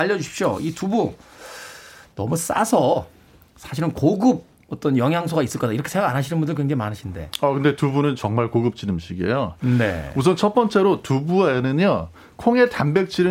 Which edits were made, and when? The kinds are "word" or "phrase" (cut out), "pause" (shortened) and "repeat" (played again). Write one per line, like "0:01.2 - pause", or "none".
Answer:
none